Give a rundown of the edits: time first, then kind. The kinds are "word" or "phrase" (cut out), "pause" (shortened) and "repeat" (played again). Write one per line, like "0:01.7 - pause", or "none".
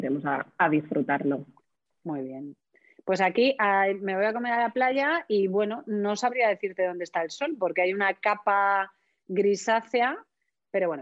none

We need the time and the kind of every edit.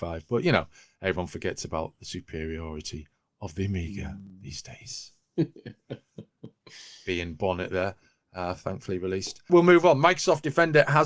none

